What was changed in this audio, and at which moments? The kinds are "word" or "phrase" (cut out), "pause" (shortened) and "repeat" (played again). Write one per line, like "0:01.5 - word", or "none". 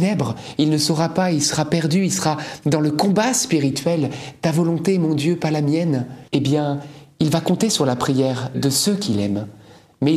0:06.3 - pause
0:08.5 - word